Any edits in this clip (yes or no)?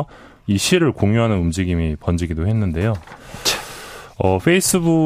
no